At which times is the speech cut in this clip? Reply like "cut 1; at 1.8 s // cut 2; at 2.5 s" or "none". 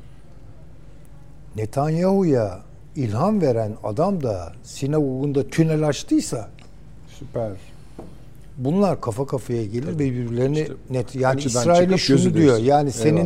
none